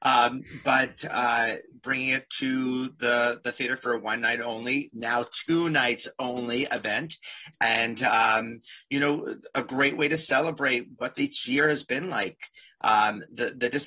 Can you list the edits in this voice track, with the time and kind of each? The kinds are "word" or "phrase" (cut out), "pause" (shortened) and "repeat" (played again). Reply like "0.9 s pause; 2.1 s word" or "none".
none